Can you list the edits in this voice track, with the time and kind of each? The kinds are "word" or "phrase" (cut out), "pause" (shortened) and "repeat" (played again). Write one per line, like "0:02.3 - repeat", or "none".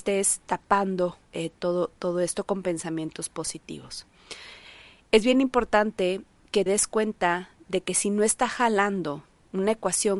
0:01.2 - pause
0:06.7 - word